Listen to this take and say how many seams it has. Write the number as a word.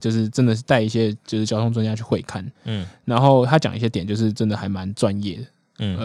one